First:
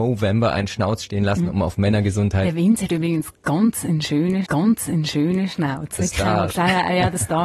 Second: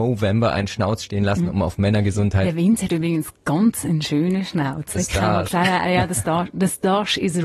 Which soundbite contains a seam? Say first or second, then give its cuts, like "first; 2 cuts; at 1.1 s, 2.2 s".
first; 1 cut; at 4.4 s